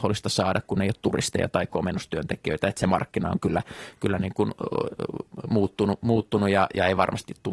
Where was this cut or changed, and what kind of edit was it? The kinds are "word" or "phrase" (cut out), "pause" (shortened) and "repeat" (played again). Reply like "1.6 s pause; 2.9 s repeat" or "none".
none